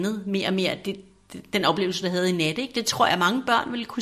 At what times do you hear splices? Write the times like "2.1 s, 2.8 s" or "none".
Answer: none